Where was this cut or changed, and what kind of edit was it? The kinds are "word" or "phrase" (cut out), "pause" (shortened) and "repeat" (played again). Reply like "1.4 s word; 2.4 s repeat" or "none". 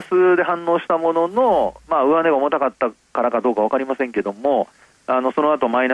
none